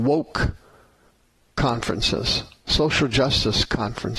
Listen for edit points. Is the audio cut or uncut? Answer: uncut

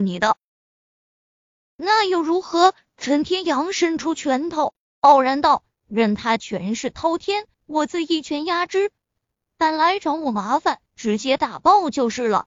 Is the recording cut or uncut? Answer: cut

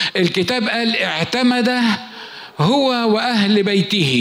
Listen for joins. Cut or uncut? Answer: uncut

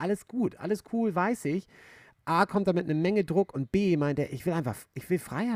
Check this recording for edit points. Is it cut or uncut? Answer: uncut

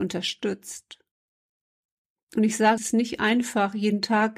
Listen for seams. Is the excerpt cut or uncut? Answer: cut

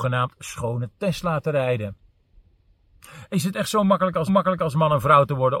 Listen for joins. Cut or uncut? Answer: cut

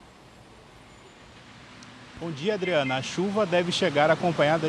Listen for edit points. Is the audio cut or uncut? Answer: uncut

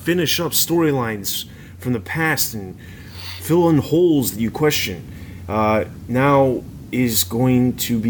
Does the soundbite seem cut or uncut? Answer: uncut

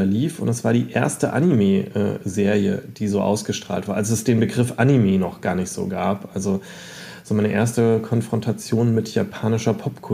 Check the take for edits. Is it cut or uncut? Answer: uncut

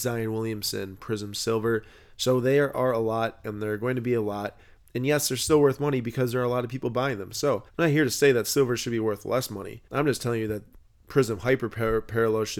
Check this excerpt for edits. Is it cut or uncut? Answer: cut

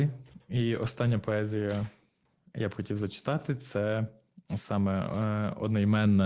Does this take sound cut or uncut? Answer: uncut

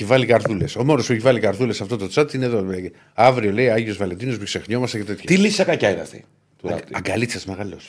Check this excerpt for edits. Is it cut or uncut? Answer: uncut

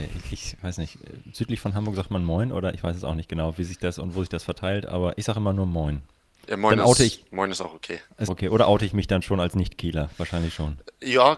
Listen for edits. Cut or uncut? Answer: cut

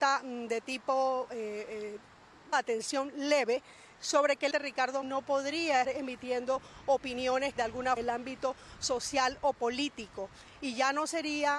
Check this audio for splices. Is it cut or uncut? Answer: cut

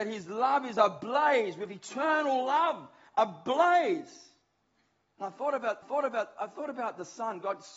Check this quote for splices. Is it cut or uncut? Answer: cut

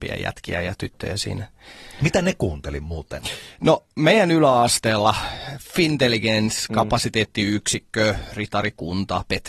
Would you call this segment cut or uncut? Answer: uncut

